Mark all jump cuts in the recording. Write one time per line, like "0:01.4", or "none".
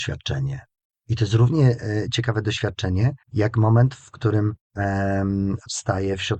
0:00.9
0:03.2
0:04.6